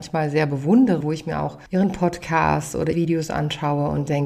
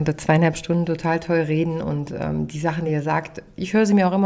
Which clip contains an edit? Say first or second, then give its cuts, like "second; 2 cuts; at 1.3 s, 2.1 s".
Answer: first; 3 cuts; at 1.0 s, 1.7 s, 2.9 s